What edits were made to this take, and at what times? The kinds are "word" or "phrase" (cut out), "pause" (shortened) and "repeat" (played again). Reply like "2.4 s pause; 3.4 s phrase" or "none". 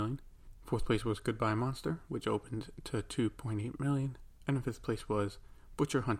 none

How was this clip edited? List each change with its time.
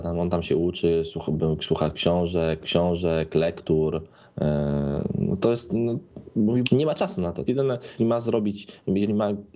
2.6 s repeat; 6.6 s word; 7.5 s word; 8.0 s word

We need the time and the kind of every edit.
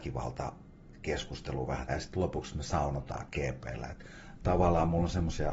1.9 s word

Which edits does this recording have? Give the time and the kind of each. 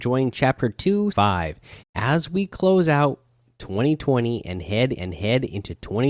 1.1 s word; 1.8 s pause; 4.9 s repeat

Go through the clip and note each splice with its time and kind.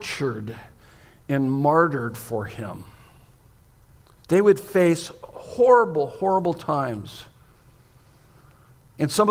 none

